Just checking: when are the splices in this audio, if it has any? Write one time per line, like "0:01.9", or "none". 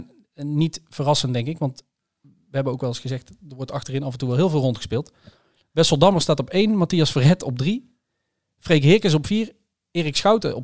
none